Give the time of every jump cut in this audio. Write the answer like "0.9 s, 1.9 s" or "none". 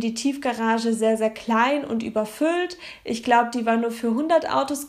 none